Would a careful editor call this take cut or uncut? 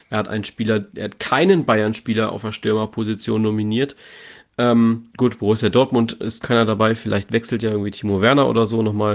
cut